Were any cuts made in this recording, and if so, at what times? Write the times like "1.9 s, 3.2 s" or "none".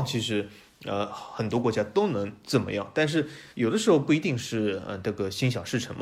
3.5 s